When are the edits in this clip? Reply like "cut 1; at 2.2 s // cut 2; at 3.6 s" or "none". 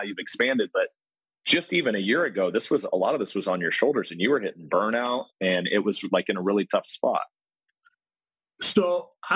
none